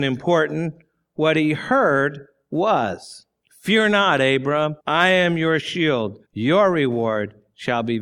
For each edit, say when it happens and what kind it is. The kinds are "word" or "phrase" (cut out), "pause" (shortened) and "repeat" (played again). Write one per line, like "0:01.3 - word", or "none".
0:03.4 - pause
0:04.8 - pause
0:06.3 - pause

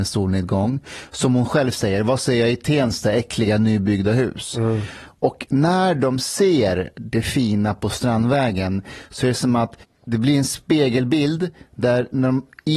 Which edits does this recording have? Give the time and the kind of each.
0:09.8 - pause

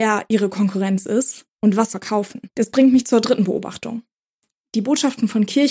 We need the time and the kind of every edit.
0:01.5 - pause
0:01.9 - phrase

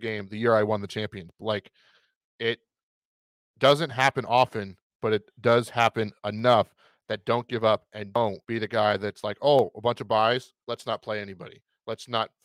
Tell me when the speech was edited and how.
0:08.4 - pause
0:10.6 - pause

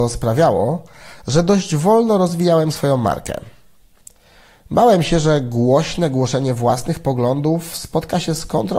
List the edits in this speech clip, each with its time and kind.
none

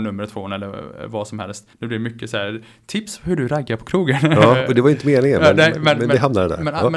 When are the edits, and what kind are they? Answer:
0:01.7 - pause

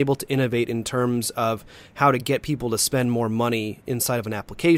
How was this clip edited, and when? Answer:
none

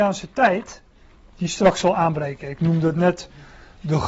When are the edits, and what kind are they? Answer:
0:02.6 - word

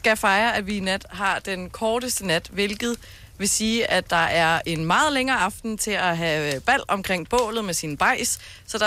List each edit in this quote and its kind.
none

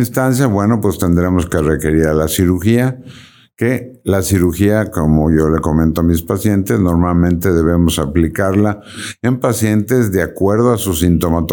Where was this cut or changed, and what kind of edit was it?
none

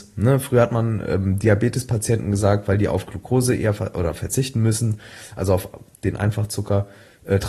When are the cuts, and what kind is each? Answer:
none

